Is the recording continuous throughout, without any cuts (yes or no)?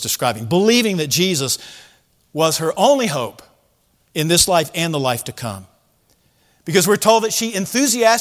yes